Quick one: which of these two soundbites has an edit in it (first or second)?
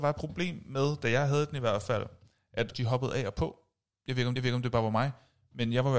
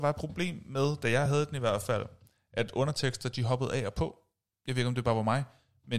first